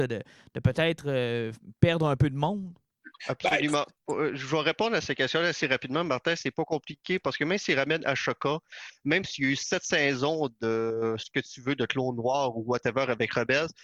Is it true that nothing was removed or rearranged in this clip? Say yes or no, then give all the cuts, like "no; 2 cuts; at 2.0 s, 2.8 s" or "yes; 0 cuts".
no; 1 cut; at 3.2 s